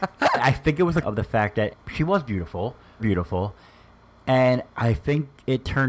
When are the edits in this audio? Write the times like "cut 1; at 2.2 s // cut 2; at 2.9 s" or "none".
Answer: cut 1; at 1.0 s // cut 2; at 1.7 s // cut 3; at 3.0 s